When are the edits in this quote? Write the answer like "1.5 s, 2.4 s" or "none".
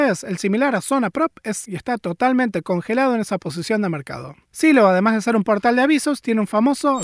1.6 s, 4.4 s